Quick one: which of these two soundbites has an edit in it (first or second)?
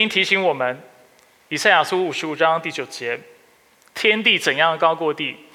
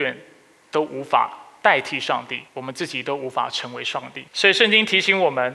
second